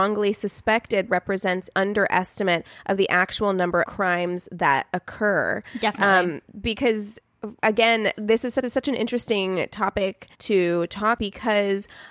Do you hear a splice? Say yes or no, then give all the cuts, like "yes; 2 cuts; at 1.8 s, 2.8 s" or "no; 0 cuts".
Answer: yes; 7 cuts; at 1.1 s, 1.7 s, 3.8 s, 7.6 s, 8.6 s, 10.3 s, 11.2 s